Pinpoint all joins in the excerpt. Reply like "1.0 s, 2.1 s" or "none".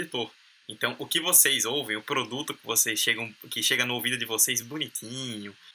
none

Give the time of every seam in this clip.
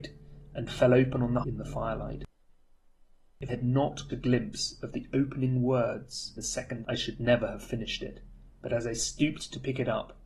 1.4 s, 3.5 s, 4.1 s, 6.4 s, 6.8 s, 8.5 s

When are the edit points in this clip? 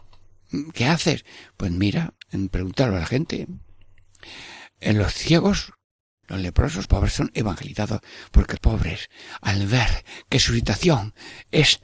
2.2 s, 6.2 s, 6.8 s, 8.6 s

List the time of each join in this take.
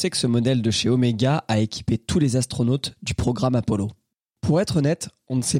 none

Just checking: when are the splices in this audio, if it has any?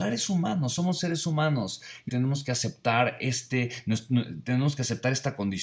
2.1 s

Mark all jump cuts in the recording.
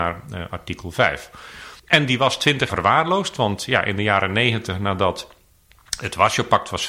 1.8 s, 2.7 s

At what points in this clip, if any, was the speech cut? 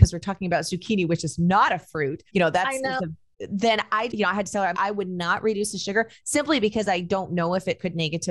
2.3 s, 4.1 s, 4.7 s

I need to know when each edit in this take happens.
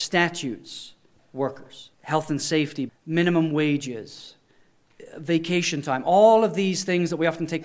1.2 s, 1.9 s, 2.9 s

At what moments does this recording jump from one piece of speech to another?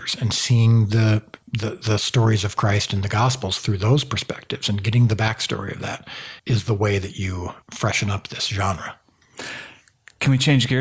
1.4 s, 6.4 s, 7.6 s

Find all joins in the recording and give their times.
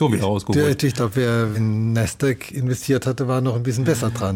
1.5 s

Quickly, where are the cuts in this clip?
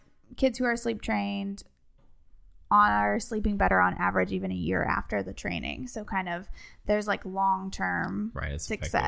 none

